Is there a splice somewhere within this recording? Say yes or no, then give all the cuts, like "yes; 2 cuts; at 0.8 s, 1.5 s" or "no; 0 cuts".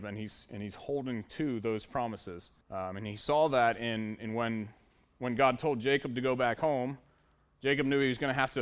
yes; 1 cut; at 2.6 s